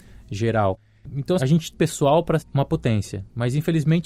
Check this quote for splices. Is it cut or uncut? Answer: cut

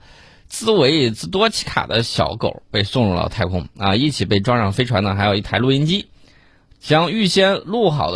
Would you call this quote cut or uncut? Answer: uncut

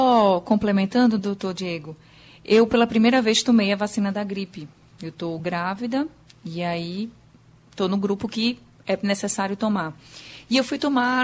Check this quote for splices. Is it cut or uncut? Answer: uncut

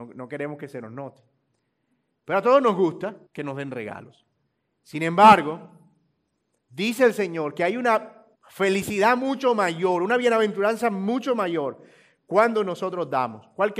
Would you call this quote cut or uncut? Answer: cut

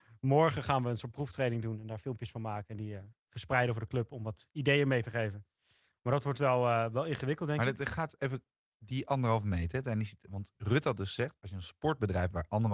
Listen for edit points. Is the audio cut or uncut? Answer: uncut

